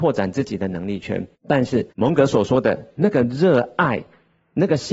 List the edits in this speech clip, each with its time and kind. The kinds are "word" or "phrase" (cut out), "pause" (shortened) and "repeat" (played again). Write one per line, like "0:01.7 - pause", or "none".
0:01.3 - pause
0:01.9 - pause